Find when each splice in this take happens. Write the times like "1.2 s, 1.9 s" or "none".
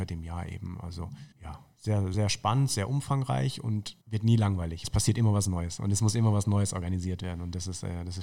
1.3 s, 2.1 s, 4.0 s, 4.8 s